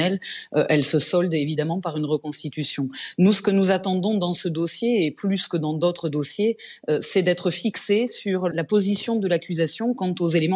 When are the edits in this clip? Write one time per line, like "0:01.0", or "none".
0:08.5